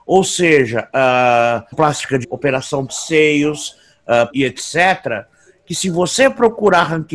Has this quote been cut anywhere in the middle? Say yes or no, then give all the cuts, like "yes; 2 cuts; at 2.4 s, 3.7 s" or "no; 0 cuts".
yes; 4 cuts; at 1.7 s, 2.2 s, 2.9 s, 4.3 s